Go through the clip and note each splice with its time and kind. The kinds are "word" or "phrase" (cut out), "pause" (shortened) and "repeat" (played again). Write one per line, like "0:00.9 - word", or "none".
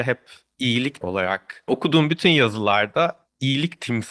0:01.0 - word
0:01.7 - word